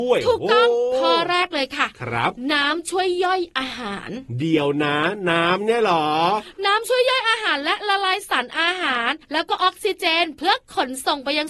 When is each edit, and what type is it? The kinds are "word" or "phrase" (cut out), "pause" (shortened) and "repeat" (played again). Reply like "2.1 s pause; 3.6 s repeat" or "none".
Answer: 9.2 s pause